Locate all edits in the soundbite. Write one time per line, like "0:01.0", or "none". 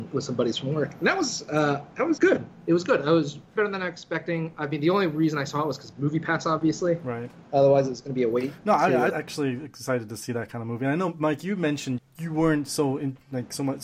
0:02.2
0:03.6
0:09.1
0:12.0